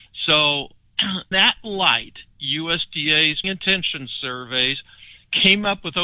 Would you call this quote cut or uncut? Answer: cut